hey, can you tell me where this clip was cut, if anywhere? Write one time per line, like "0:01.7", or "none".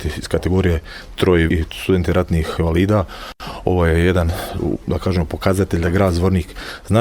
0:01.5
0:02.6